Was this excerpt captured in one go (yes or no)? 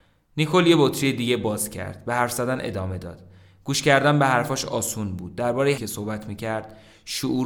no